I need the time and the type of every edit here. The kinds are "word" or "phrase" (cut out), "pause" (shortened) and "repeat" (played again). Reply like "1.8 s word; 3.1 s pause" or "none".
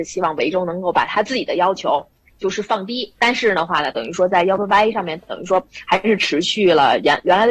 3.2 s pause; 3.9 s phrase